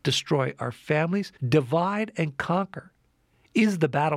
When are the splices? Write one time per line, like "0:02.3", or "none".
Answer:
0:01.4